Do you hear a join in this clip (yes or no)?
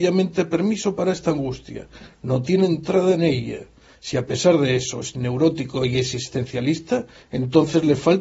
no